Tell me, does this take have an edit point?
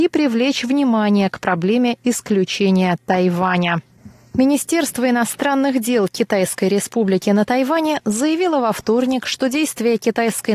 no; 0 cuts

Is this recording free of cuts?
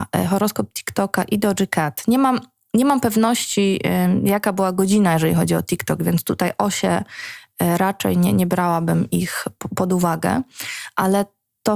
yes; 0 cuts

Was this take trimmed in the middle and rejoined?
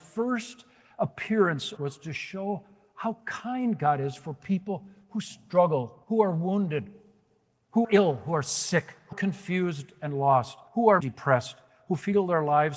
yes; 6 cuts; at 1.8 s, 6.0 s, 7.8 s, 9.1 s, 10.7 s, 11.0 s

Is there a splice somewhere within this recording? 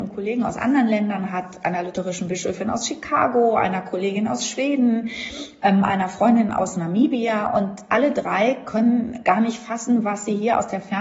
no; 0 cuts

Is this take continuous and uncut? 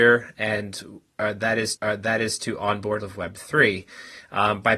no; 2 cuts; at 1.8 s, 3.0 s

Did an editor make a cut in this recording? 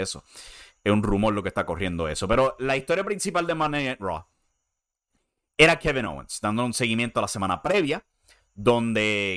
no; 0 cuts

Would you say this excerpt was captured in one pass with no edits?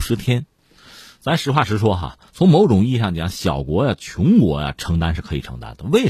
no; 1 cut; at 2.3 s

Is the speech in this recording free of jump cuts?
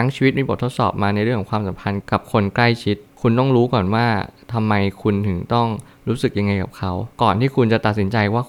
no; 1 cut; at 7.1 s

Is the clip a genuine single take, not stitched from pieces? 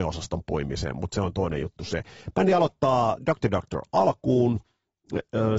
yes; 0 cuts

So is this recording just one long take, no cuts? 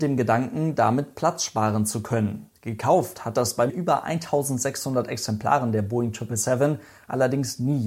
no; 1 cut; at 3.7 s

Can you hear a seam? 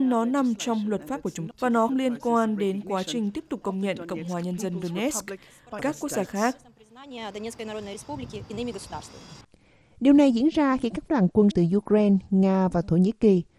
yes; 5 cuts; at 1.5 s, 1.9 s, 5.8 s, 11.1 s, 11.5 s

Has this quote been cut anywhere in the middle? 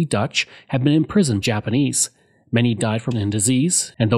yes; 2 cuts; at 1.4 s, 3.1 s

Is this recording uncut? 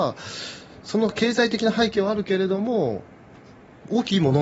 yes; 0 cuts

